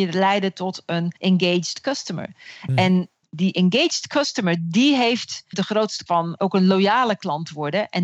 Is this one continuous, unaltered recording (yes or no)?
no